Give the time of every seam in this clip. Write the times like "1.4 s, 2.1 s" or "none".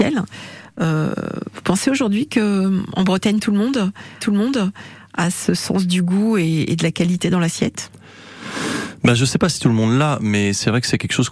4.2 s